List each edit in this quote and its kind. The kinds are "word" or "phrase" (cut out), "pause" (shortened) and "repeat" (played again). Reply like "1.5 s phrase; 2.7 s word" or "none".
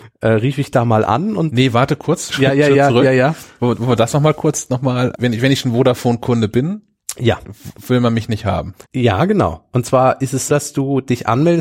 2.3 s word; 5.1 s word; 8.8 s pause; 10.5 s word